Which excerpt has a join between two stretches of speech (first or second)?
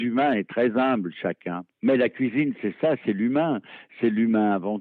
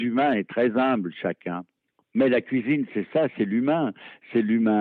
first